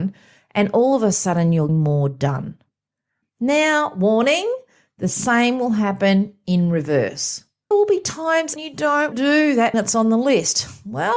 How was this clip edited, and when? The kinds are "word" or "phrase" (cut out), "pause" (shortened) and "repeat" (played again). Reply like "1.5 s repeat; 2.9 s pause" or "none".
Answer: 1.7 s word; 7.7 s word; 8.6 s word; 9.1 s word; 9.7 s word